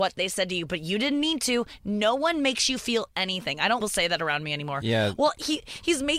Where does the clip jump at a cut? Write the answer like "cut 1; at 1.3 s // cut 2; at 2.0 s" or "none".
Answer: cut 1; at 3.8 s